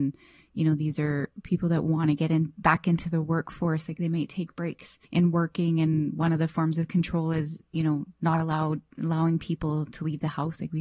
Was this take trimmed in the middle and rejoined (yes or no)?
yes